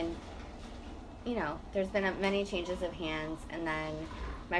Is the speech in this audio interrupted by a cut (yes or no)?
no